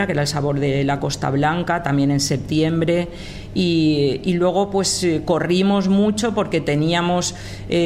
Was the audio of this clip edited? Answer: no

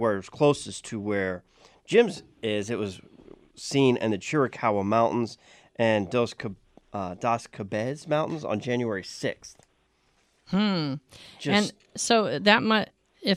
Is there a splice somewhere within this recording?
no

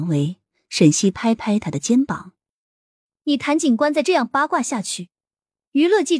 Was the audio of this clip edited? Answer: no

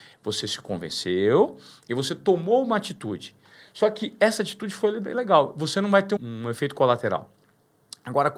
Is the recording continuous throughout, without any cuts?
no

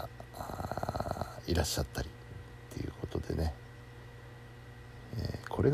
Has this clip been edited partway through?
no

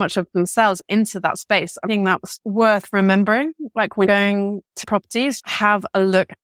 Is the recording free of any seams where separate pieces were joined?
no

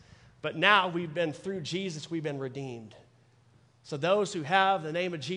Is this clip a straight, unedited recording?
yes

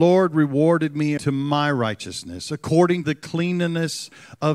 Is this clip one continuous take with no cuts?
no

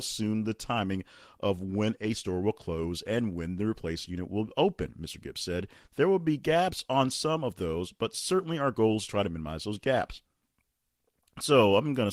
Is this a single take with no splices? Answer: yes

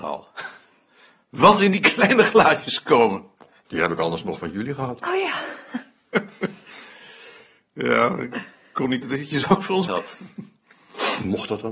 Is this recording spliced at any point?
yes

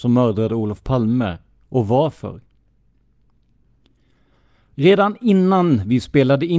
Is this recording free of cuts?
yes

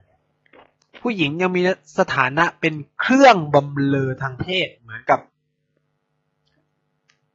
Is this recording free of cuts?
yes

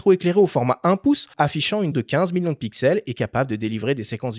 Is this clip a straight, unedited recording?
no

